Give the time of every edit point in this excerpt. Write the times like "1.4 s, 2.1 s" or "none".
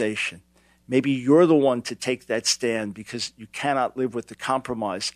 none